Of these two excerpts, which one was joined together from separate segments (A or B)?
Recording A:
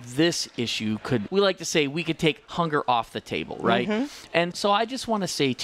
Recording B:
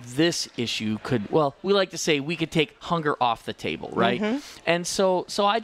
A